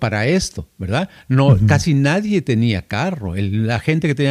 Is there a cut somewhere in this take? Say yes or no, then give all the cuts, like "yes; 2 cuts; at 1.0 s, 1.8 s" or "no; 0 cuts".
no; 0 cuts